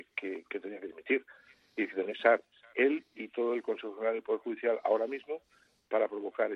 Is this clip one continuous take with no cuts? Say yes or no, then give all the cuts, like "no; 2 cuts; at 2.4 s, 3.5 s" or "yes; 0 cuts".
no; 2 cuts; at 2.1 s, 2.7 s